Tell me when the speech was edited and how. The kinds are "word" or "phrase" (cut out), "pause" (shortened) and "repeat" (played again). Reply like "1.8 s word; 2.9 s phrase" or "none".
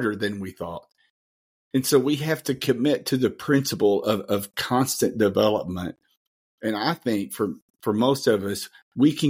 none